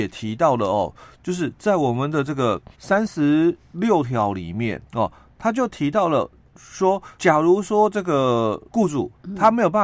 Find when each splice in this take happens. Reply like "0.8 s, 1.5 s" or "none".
2.7 s, 4.9 s, 7.1 s, 8.7 s